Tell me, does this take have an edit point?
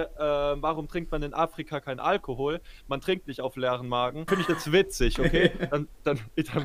yes; 1 cut; at 4.3 s

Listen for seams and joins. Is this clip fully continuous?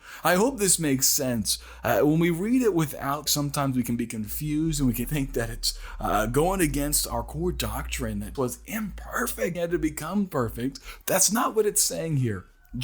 no; 4 cuts; at 3.3 s, 5.0 s, 8.3 s, 9.5 s

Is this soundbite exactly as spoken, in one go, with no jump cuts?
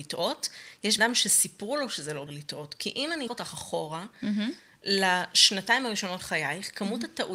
no; 4 cuts; at 1.0 s, 2.3 s, 3.3 s, 6.2 s

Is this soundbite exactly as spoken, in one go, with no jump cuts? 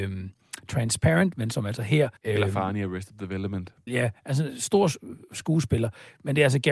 no; 2 cuts; at 2.2 s, 3.9 s

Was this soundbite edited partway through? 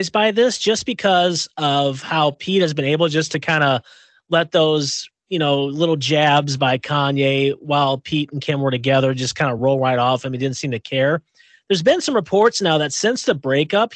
no; 0 cuts

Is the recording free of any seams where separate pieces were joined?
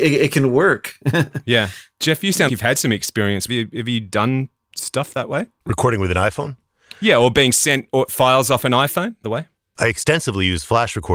no; 3 cuts; at 2.5 s, 3.5 s, 9.2 s

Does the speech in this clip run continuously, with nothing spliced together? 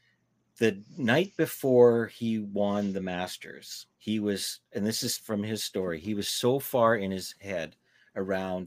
no; 1 cut; at 3.9 s

